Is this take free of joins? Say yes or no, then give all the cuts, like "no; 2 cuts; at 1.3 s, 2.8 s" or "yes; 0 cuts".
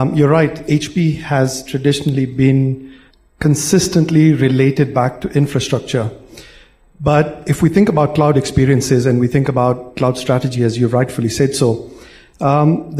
yes; 0 cuts